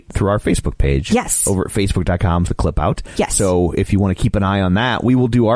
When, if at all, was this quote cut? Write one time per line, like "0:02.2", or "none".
0:02.5